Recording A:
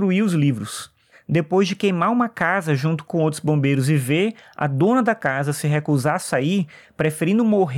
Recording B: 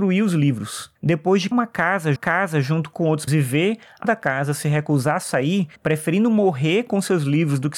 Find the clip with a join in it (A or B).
B